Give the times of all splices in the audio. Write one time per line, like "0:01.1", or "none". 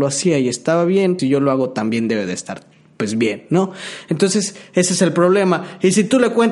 0:01.2